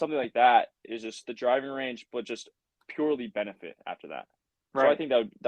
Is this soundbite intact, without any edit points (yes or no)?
yes